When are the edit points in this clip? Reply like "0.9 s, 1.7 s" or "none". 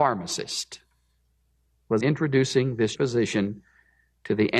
2.0 s, 3.0 s